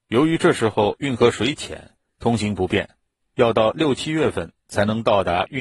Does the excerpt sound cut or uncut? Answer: uncut